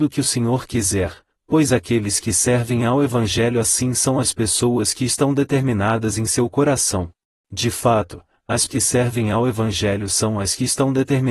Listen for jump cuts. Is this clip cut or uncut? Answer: cut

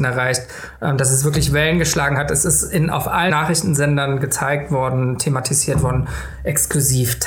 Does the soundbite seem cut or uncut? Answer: cut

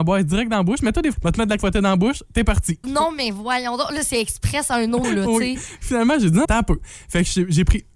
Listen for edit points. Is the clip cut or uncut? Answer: cut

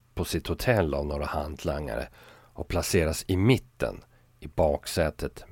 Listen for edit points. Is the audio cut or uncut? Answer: uncut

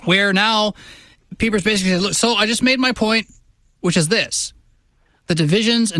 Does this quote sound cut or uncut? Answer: uncut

